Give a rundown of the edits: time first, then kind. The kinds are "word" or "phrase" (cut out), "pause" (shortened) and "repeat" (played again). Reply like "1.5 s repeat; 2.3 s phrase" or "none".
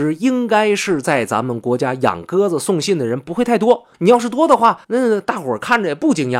3.9 s pause; 4.8 s pause